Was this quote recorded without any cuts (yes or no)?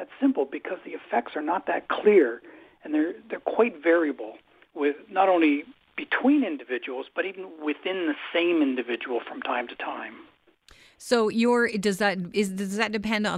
yes